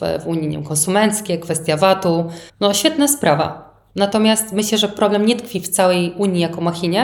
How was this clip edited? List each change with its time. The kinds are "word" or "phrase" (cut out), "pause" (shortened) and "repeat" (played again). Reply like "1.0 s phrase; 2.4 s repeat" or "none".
2.5 s pause